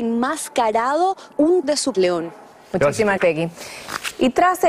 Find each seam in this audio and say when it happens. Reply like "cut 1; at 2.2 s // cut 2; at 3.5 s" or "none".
cut 1; at 1.3 s // cut 2; at 1.6 s // cut 3; at 1.9 s // cut 4; at 3.2 s